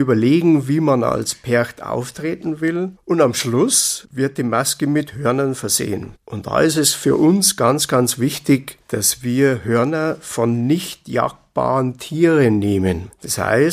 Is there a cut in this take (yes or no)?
no